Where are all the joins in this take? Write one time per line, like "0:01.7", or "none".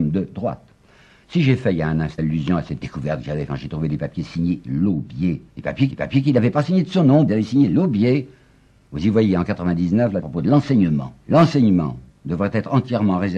0:02.2
0:02.8
0:03.5
0:05.5
0:05.9
0:07.3
0:10.2
0:11.2